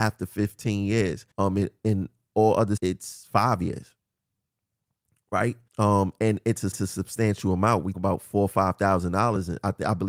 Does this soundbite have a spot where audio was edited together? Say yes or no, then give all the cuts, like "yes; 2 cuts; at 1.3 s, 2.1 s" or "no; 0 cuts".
yes; 5 cuts; at 1.3 s, 2.8 s, 5.7 s, 6.7 s, 7.9 s